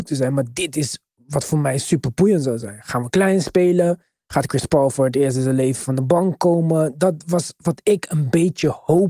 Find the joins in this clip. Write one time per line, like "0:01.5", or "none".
none